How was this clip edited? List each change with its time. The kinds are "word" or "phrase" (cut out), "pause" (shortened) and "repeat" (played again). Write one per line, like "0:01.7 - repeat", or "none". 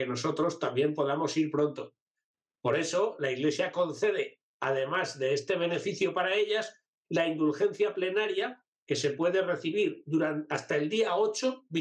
none

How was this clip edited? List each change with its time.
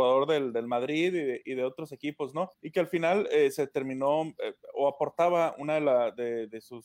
0:02.5 - pause

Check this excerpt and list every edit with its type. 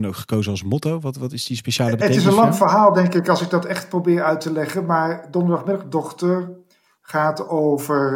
none

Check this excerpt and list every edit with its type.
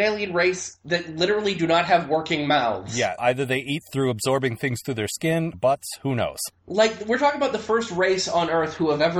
0:03.2 - word
0:05.5 - phrase
0:06.6 - pause

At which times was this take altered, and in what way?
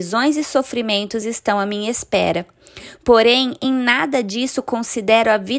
none

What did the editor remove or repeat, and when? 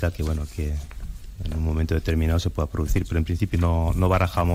0:03.5 - word

